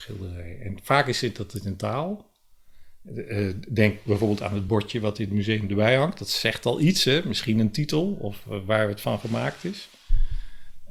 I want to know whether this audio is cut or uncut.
uncut